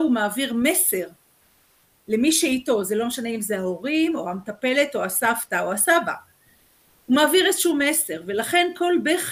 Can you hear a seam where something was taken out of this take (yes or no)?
no